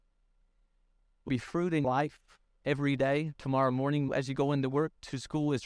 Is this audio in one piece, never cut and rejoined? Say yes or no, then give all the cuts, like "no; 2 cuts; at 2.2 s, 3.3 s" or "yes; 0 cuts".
no; 3 cuts; at 1.3 s, 1.8 s, 4.1 s